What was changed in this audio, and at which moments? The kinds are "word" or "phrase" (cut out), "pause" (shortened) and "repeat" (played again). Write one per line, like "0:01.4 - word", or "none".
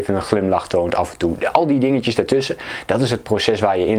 none